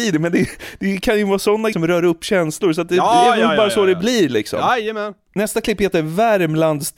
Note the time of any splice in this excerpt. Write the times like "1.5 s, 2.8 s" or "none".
1.7 s